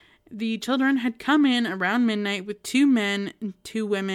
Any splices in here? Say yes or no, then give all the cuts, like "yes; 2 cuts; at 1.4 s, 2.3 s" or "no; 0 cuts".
no; 0 cuts